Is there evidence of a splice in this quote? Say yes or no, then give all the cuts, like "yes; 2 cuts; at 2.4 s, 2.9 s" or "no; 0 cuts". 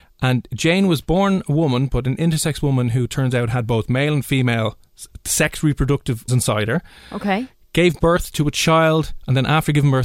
yes; 1 cut; at 6.3 s